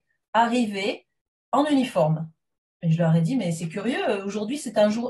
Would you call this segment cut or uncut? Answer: uncut